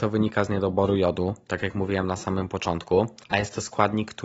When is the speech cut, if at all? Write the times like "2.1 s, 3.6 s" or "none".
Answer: none